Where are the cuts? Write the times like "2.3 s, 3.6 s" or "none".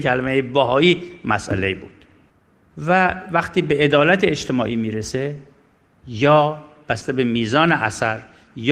none